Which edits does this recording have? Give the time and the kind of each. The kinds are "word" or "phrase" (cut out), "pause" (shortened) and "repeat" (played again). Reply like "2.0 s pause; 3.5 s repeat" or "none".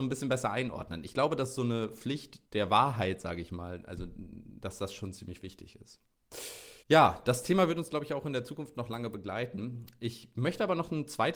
2.4 s pause; 6.8 s pause